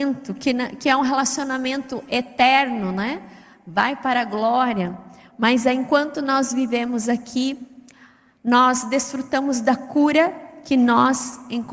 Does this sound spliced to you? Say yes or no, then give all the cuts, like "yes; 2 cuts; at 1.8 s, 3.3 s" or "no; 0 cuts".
no; 0 cuts